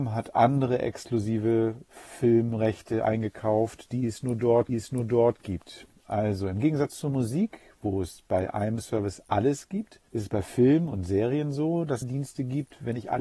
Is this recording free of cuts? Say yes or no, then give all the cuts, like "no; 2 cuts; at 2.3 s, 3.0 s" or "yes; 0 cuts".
no; 3 cuts; at 4.7 s, 10.1 s, 12.0 s